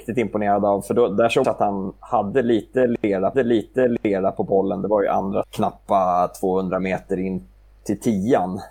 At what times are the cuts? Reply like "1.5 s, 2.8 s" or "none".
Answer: 1.4 s, 3.3 s, 5.4 s